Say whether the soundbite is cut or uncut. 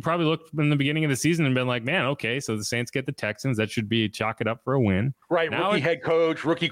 cut